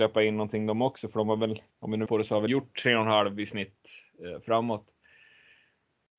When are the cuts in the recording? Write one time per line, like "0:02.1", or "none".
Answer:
0:01.7
0:02.1
0:02.5